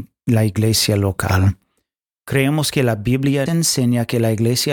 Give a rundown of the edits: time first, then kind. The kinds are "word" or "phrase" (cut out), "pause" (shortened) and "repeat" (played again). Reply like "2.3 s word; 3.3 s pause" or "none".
3.5 s word

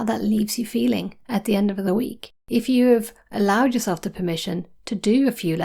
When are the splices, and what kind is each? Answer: 2.4 s pause

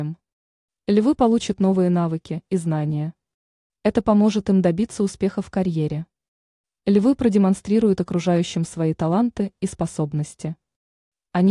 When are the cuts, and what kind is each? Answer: none

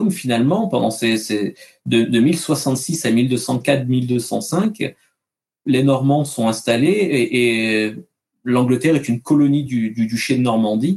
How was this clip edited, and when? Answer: none

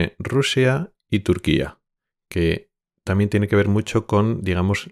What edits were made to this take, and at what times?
none

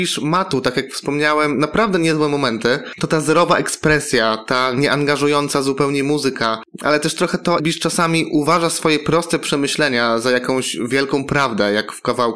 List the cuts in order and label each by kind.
7.6 s word

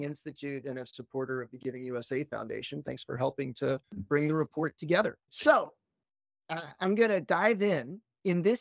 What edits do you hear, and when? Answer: 3.8 s pause; 5.2 s pause

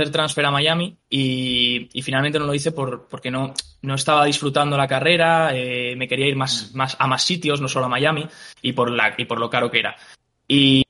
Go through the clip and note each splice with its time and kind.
3.1 s word

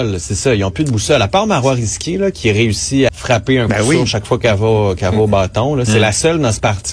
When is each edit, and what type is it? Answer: 3.1 s word

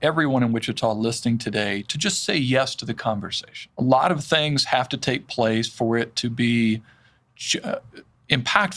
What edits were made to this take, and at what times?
3.7 s pause

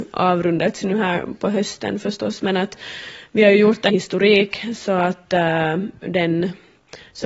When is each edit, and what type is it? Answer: 3.9 s word

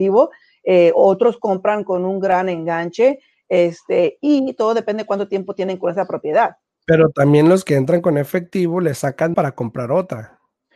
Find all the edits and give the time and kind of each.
9.3 s word

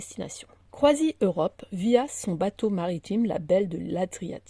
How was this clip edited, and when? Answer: none

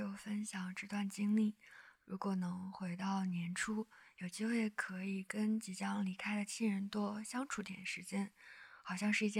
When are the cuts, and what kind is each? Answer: none

